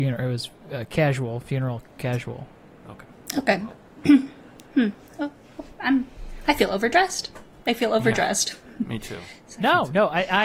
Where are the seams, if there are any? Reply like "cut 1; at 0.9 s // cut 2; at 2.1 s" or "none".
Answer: none